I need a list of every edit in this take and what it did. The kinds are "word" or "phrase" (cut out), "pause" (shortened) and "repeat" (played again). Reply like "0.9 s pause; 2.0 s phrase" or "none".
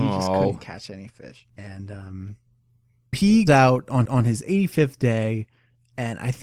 1.5 s pause; 3.1 s word; 3.5 s word; 4.0 s repeat